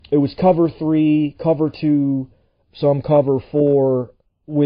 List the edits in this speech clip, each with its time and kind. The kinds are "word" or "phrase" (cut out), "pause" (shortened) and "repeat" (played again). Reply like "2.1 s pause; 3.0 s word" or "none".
none

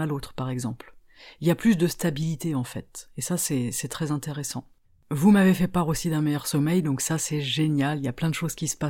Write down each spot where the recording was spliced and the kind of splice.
4.8 s pause

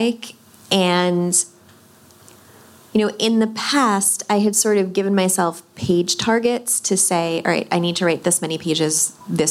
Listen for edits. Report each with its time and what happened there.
none

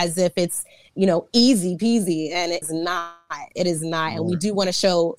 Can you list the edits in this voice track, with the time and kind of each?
2.6 s phrase

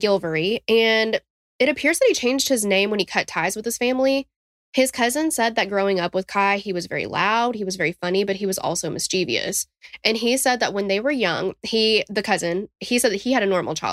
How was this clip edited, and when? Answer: none

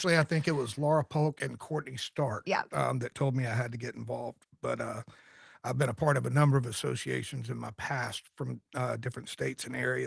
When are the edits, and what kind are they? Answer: none

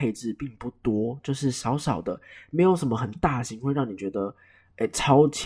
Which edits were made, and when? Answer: none

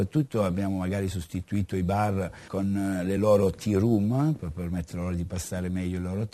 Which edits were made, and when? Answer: none

